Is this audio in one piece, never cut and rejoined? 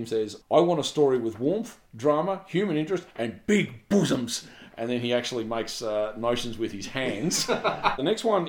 yes; 0 cuts

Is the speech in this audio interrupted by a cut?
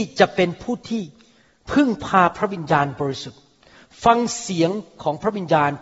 no; 0 cuts

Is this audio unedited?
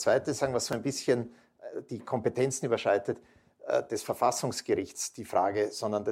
yes; 0 cuts

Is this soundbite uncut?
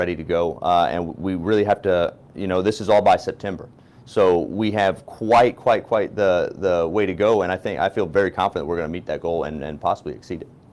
no; 1 cut; at 2.3 s

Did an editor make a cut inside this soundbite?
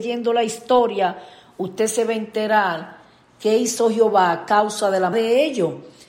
yes; 1 cut; at 5.1 s

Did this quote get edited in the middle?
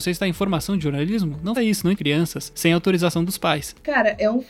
yes; 2 cuts; at 1.6 s, 1.9 s

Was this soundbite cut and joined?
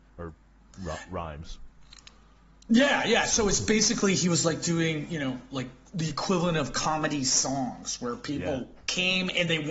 no; 0 cuts

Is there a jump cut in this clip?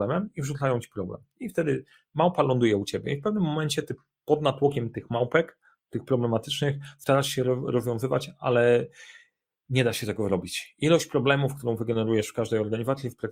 no; 0 cuts

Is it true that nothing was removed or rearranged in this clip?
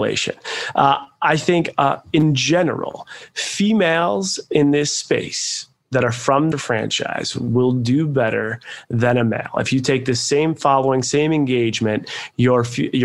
no; 1 cut; at 6.5 s

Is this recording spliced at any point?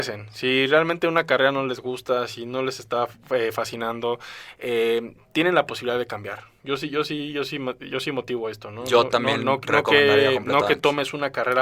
no; 0 cuts

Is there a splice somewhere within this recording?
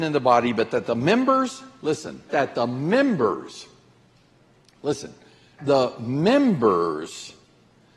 yes; 2 cuts; at 2.3 s, 5.6 s

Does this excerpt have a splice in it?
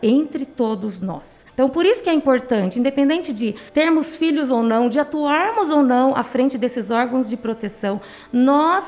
yes; 2 cuts; at 1.5 s, 3.7 s

